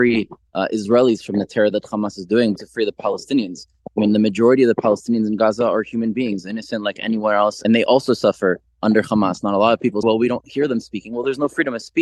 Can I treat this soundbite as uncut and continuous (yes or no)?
no